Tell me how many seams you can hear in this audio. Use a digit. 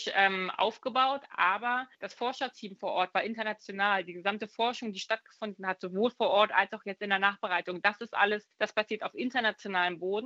2